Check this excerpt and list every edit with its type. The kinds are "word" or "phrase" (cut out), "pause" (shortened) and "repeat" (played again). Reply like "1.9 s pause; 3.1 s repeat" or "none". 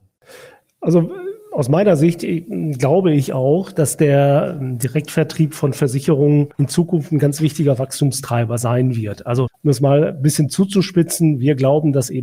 6.5 s pause; 9.5 s word